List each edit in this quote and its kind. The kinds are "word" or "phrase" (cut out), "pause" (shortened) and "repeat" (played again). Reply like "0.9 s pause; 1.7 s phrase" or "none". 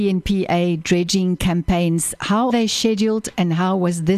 2.5 s word